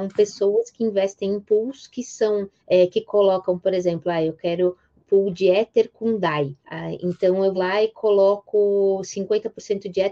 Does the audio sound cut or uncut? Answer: cut